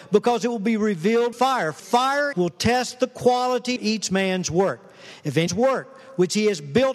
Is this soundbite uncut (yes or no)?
no